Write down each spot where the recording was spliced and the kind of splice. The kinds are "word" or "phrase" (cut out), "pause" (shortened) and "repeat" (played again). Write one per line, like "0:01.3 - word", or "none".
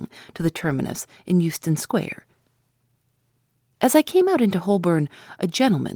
none